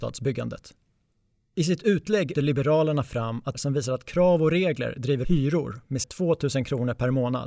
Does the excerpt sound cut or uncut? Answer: cut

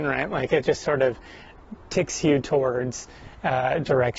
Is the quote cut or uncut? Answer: uncut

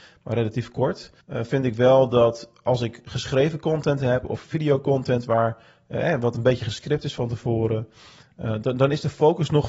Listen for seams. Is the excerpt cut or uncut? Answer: cut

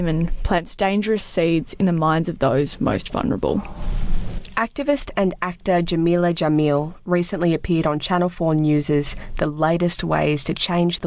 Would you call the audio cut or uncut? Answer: uncut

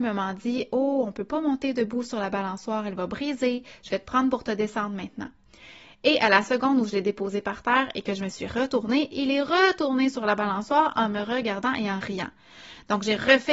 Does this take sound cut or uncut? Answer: uncut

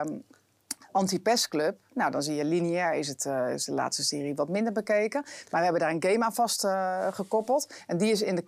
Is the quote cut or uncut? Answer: uncut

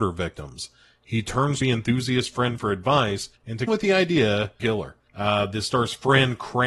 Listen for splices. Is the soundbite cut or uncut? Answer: cut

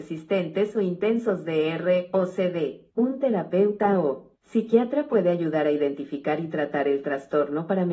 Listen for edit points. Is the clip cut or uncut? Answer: cut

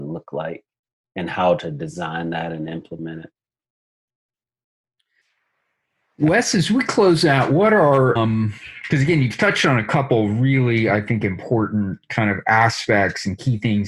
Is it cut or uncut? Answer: cut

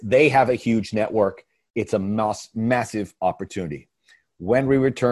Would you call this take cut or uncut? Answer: uncut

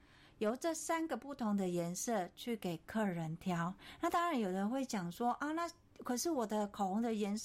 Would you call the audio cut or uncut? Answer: uncut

